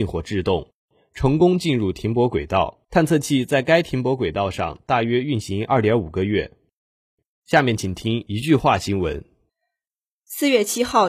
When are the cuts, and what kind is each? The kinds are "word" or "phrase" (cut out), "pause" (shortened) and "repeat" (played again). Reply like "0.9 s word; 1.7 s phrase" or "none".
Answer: 2.8 s pause